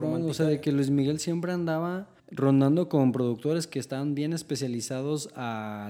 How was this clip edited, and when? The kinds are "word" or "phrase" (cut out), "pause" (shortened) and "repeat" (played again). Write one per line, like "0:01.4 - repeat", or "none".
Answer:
0:02.2 - pause